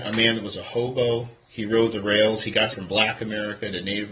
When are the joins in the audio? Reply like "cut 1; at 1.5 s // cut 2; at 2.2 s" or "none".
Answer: cut 1; at 2.7 s